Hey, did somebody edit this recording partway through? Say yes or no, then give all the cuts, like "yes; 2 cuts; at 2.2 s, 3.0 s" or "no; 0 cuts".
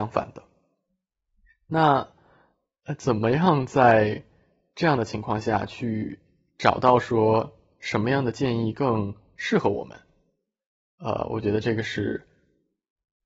no; 0 cuts